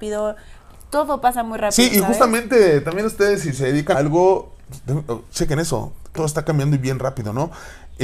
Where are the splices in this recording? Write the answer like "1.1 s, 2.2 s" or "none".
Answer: 3.9 s, 6.2 s